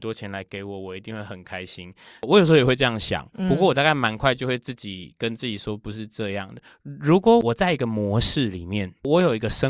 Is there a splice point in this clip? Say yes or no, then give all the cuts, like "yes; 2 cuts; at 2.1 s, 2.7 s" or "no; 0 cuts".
yes; 1 cut; at 6.6 s